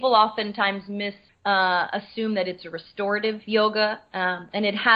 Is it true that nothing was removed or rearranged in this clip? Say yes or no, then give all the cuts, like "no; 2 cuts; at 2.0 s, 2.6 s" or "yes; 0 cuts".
no; 1 cut; at 1.3 s